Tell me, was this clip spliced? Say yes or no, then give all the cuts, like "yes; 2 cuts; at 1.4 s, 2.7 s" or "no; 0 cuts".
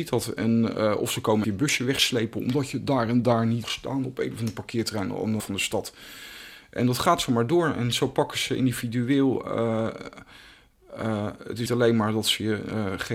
yes; 4 cuts; at 1.4 s, 3.6 s, 5.4 s, 11.7 s